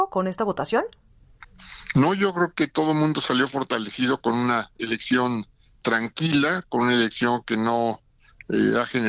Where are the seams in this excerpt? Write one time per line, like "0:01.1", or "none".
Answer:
none